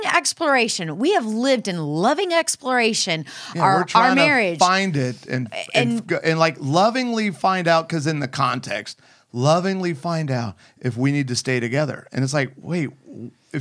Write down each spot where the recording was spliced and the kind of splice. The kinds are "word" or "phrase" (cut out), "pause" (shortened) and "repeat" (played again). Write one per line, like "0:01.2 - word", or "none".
none